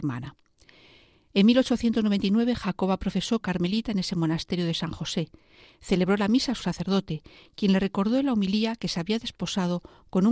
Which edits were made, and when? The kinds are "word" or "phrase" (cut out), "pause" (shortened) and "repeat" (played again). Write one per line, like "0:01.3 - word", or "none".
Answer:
0:03.4 - word
0:06.6 - word